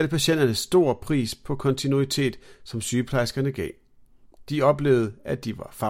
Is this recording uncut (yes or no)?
yes